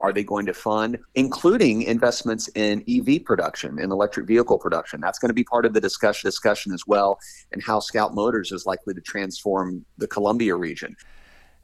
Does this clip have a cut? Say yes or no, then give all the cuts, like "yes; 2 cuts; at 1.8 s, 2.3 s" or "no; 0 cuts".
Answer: yes; 2 cuts; at 1.0 s, 6.2 s